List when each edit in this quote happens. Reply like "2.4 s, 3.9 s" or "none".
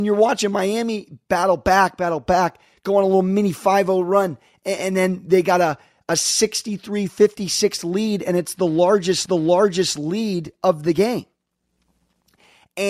9.3 s